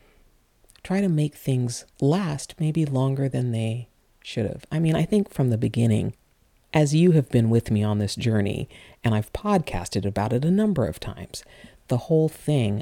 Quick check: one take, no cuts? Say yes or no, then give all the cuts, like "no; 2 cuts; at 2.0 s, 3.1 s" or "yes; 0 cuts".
no; 1 cut; at 1.9 s